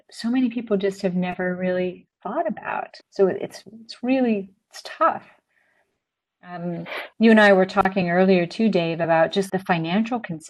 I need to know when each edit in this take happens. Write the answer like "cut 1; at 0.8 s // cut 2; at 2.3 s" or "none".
cut 1; at 3.0 s // cut 2; at 7.1 s // cut 3; at 9.5 s